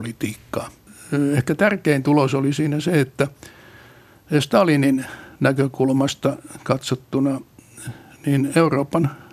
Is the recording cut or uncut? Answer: uncut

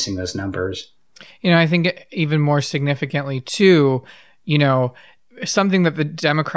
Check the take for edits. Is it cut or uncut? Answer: uncut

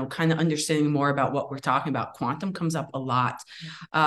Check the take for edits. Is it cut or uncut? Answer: uncut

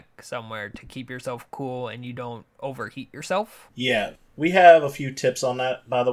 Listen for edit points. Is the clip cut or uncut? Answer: uncut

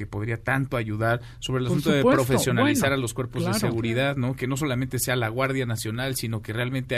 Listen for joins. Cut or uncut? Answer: uncut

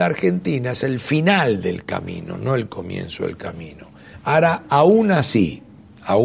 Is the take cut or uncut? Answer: uncut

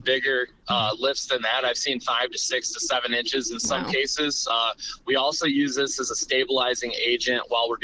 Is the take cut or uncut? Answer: uncut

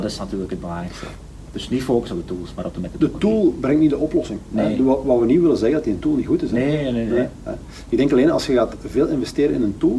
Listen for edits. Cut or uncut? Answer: uncut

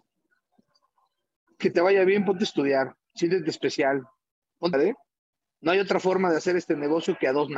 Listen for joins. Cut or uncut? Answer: cut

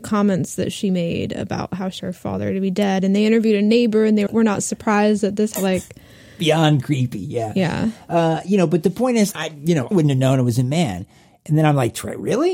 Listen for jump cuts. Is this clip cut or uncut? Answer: cut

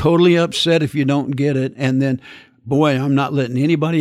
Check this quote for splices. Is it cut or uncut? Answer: uncut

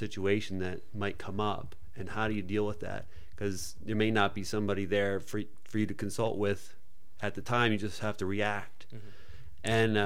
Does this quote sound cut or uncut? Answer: uncut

